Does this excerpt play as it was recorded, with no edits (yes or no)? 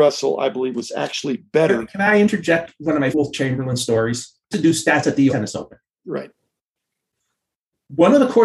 no